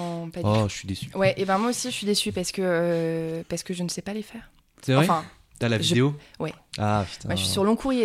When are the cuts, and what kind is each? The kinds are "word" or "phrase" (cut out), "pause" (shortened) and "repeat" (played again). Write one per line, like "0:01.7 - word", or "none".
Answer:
none